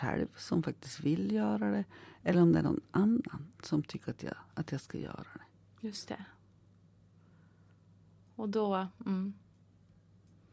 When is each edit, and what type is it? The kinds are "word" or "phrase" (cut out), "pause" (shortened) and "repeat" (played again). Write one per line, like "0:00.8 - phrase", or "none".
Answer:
none